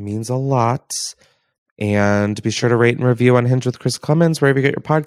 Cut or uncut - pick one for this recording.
uncut